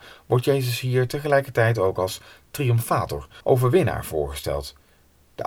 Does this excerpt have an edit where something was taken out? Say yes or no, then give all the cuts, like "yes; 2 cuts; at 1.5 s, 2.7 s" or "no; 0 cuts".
yes; 1 cut; at 3.4 s